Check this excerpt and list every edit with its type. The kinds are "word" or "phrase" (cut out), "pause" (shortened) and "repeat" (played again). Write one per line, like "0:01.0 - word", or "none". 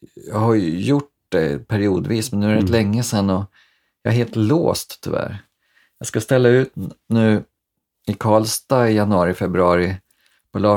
none